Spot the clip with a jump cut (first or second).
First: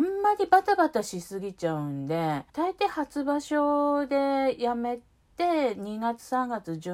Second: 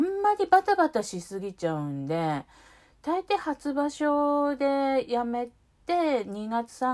first